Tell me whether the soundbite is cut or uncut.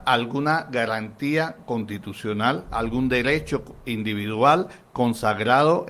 uncut